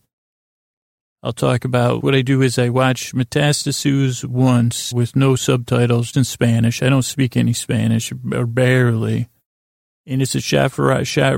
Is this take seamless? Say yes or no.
no